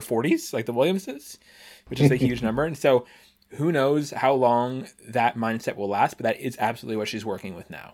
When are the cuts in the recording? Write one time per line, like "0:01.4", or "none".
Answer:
none